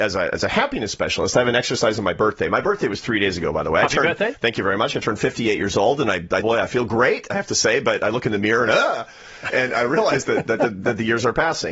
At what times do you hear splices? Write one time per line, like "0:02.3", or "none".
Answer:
0:06.4